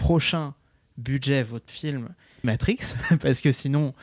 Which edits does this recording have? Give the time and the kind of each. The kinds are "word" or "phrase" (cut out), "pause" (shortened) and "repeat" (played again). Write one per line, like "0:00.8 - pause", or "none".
0:01.7 - word
0:02.4 - word